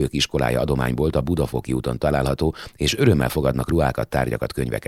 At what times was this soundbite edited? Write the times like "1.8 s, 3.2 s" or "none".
none